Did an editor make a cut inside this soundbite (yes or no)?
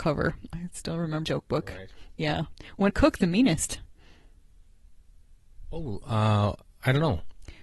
yes